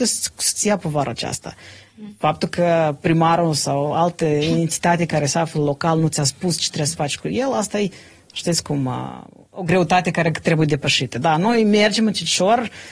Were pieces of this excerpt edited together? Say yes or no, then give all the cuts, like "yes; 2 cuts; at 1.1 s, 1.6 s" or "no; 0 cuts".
no; 0 cuts